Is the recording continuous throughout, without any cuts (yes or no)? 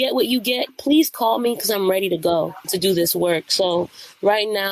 yes